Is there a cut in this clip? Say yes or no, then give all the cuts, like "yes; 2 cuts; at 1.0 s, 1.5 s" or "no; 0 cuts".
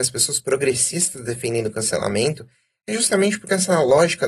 no; 0 cuts